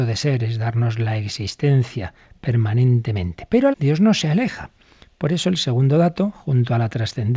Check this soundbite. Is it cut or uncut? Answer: cut